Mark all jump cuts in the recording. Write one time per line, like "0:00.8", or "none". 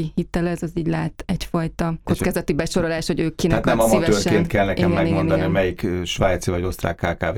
none